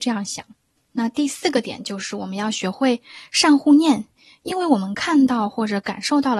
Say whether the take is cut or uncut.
uncut